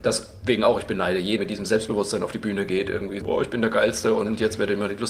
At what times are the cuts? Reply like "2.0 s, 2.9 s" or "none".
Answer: 1.4 s, 3.2 s